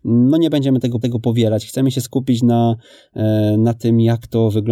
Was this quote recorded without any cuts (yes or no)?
no